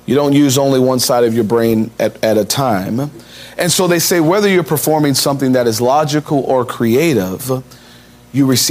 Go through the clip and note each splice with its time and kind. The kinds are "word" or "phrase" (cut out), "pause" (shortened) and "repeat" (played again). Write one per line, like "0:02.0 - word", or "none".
none